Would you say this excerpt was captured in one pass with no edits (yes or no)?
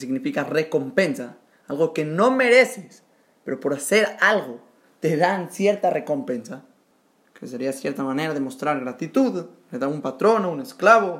yes